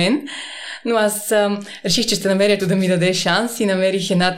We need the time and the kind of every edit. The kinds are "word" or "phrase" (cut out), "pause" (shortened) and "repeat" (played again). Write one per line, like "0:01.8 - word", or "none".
0:02.6 - phrase